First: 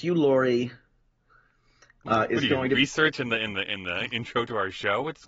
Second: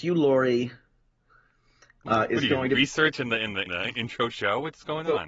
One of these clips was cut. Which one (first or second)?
second